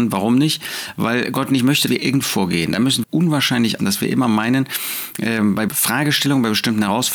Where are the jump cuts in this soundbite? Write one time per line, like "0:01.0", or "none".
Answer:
0:01.9
0:02.2
0:03.0
0:03.8
0:05.7